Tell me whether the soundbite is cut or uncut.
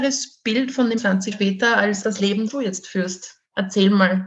cut